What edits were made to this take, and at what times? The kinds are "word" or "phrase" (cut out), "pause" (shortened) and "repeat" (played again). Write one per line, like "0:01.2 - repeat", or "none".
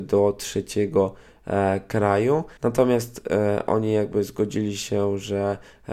0:02.6 - pause